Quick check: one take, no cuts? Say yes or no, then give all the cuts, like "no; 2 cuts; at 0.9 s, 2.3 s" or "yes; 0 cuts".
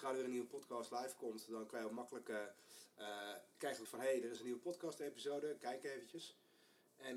no; 1 cut; at 3.8 s